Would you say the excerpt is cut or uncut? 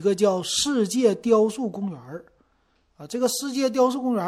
uncut